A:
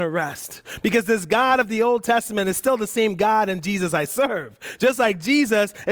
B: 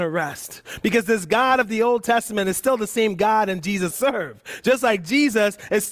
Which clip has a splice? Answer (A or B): B